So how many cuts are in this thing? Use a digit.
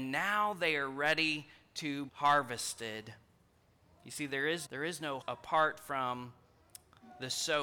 3